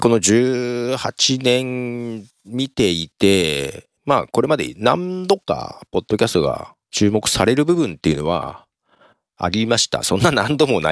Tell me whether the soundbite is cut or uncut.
cut